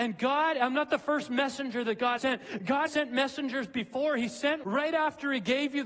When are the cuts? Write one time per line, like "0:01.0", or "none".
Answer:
0:02.2
0:02.9
0:04.6